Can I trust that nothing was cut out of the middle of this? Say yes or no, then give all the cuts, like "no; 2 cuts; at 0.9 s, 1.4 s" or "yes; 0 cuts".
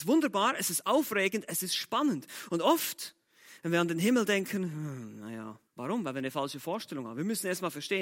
no; 1 cut; at 5.7 s